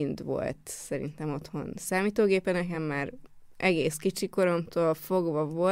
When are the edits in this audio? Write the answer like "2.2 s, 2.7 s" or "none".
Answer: none